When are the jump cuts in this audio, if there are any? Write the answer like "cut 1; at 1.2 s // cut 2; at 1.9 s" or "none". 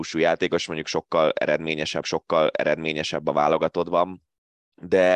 cut 1; at 2.0 s